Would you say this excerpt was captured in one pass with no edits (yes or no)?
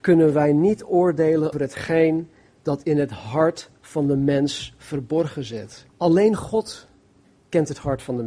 no